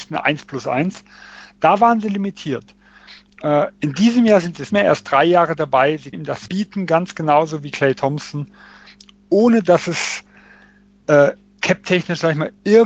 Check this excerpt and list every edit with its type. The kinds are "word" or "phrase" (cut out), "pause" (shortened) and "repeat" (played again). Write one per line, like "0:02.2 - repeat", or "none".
0:04.7 - word
0:06.1 - word
0:06.5 - word